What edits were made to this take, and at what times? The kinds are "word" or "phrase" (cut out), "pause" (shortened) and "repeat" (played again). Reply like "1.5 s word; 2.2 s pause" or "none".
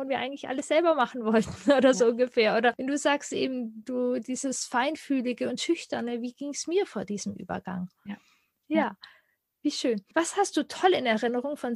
3.8 s word